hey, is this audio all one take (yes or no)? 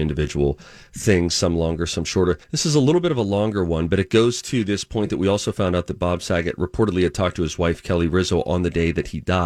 no